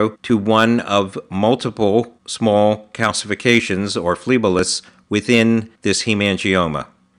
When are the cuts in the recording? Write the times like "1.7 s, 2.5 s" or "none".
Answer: 5.8 s